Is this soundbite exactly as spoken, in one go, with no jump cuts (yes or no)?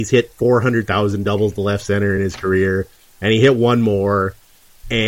yes